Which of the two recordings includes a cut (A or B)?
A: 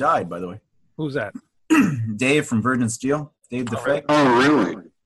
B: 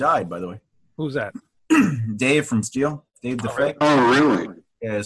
B